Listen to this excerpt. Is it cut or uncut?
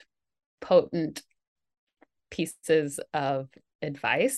uncut